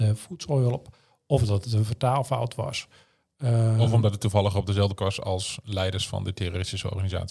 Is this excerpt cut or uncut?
cut